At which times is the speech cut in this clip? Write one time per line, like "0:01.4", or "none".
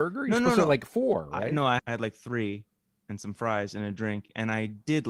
0:01.8

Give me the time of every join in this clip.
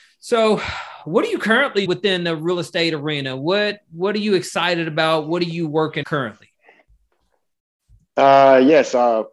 0:01.9
0:06.0

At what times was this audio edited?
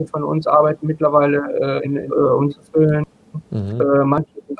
0:02.1
0:02.5

